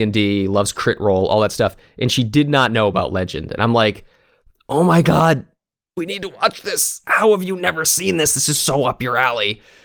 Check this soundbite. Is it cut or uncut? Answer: uncut